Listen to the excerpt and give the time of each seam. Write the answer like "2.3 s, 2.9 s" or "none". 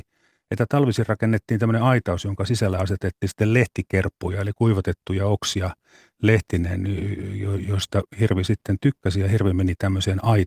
none